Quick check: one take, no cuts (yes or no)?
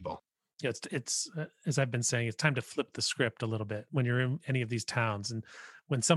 yes